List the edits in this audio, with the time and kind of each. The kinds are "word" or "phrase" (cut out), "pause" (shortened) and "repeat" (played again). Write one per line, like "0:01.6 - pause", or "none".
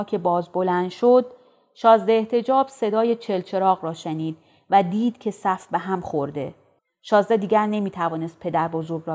none